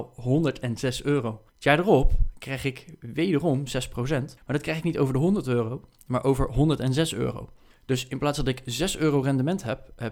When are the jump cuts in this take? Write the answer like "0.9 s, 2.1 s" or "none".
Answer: 1.5 s, 4.4 s, 7.7 s